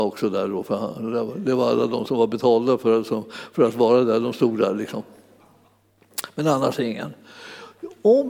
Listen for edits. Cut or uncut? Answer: uncut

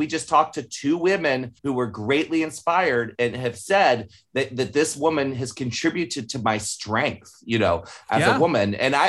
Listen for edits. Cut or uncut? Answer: cut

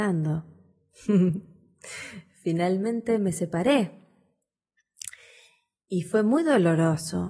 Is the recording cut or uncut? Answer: uncut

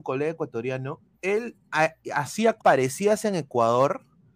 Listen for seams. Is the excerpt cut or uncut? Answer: cut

